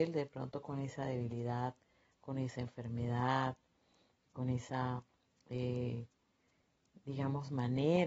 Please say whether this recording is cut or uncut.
uncut